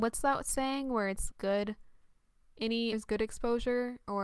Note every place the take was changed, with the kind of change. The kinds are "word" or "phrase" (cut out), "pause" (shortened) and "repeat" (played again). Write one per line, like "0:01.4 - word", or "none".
0:01.3 - word
0:02.9 - word